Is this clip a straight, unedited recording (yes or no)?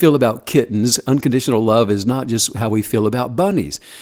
yes